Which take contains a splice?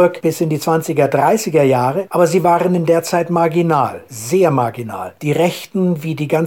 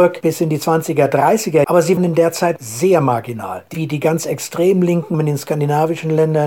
second; 5 cuts; at 1.6 s, 2.0 s, 2.6 s, 3.7 s, 5.1 s

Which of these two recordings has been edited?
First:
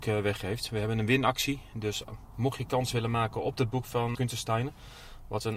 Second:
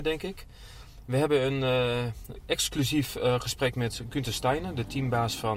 first; 1 cut; at 4.1 s

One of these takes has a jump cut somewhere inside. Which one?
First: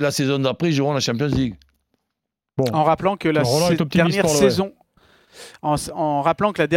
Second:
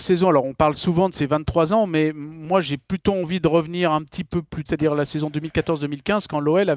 second; 1 cut; at 4.7 s

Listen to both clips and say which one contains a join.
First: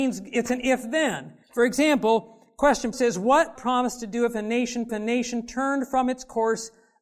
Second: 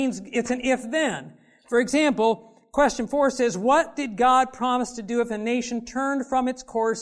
first; 4 cuts; at 1.4 s, 2.9 s, 3.6 s, 4.9 s

